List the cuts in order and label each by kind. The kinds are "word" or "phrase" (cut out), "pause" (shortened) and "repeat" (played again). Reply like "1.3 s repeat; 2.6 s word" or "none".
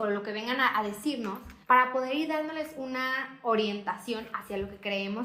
1.6 s pause

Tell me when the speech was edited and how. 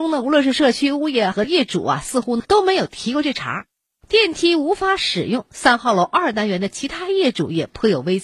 none

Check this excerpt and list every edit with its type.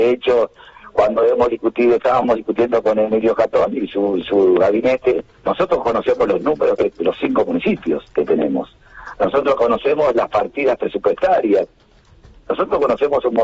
5.4 s word; 8.1 s pause

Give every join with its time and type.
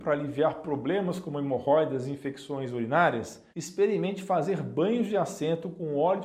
3.5 s pause

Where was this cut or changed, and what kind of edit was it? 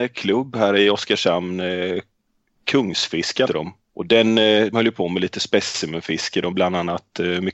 3.5 s word; 4.7 s word; 6.5 s word

